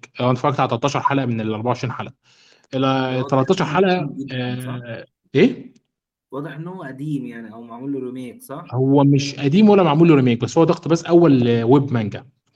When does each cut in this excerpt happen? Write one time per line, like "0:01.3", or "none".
0:05.2